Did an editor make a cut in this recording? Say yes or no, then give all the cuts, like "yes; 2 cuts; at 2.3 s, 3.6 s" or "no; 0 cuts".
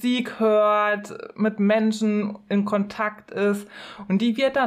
no; 0 cuts